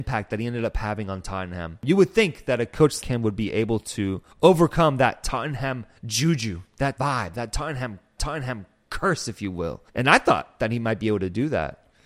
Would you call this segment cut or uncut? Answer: cut